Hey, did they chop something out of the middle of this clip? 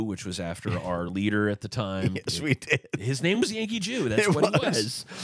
no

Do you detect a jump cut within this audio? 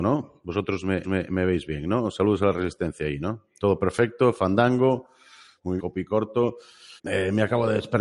yes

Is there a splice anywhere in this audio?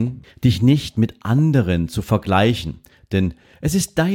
no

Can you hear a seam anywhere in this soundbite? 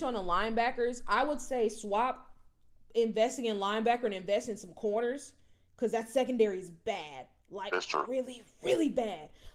no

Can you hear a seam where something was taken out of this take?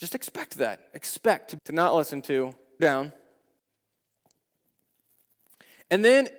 yes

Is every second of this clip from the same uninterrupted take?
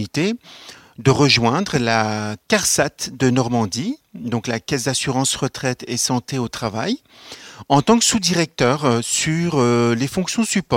yes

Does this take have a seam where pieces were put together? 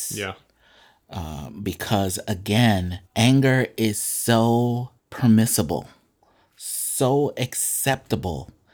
yes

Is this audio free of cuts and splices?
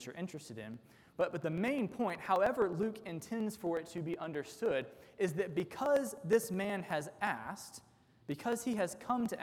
yes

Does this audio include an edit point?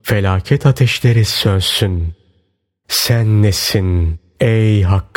no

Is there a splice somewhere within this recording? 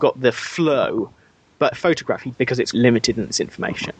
yes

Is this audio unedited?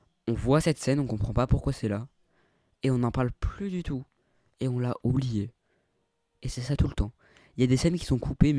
yes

